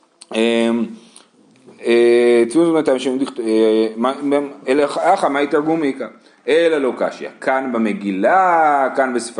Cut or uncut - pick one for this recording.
uncut